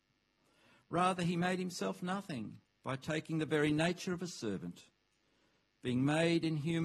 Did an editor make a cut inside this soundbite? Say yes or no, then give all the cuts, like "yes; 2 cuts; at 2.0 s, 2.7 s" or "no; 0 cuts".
yes; 1 cut; at 2.7 s